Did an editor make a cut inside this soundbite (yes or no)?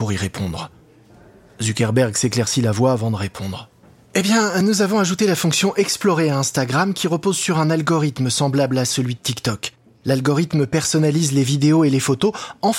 no